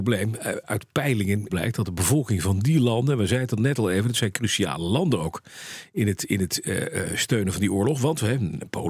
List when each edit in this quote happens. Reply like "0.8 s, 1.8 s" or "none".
1.5 s